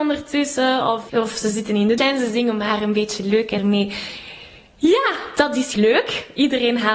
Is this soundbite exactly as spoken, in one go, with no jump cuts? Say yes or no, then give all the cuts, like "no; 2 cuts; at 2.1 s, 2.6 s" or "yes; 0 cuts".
no; 4 cuts; at 1.1 s, 2.0 s, 3.6 s, 5.7 s